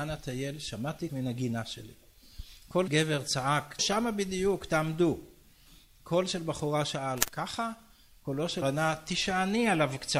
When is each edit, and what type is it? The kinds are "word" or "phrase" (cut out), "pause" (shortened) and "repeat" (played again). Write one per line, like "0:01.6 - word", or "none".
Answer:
0:01.1 - word
0:02.9 - word
0:03.8 - word
0:08.6 - word